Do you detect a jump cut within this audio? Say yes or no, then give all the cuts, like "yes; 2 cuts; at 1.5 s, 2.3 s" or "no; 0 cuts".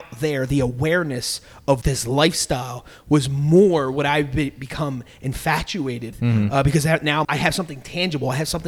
yes; 3 cuts; at 1.8 s, 6.1 s, 7.2 s